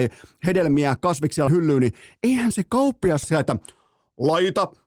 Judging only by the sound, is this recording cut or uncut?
cut